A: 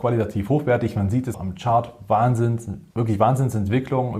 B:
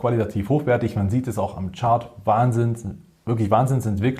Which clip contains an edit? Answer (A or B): A